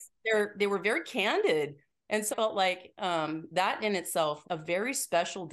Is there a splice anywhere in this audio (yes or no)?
yes